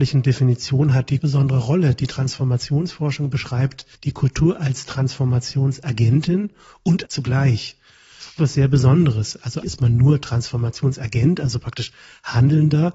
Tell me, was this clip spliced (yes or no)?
yes